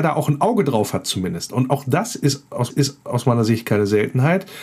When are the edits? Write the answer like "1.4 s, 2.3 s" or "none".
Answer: 2.7 s